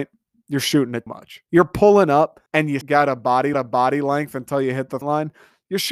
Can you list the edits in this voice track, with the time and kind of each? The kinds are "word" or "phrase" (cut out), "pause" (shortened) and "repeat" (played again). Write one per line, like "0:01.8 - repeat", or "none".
0:01.1 - word
0:01.5 - pause
0:02.5 - pause
0:02.8 - word
0:03.5 - repeat
0:05.0 - word